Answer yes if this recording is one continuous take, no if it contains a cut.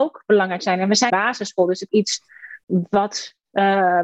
no